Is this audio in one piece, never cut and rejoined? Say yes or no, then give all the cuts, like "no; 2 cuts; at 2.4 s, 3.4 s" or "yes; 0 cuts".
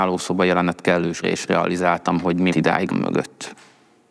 no; 3 cuts; at 1.2 s, 2.5 s, 2.9 s